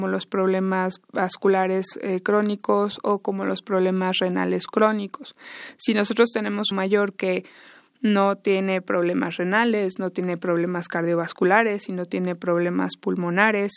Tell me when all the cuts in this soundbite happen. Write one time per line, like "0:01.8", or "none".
0:06.7